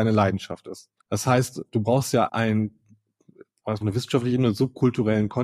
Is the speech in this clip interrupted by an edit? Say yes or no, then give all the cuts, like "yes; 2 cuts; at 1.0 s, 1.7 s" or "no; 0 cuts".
yes; 3 cuts; at 1.0 s, 2.3 s, 3.8 s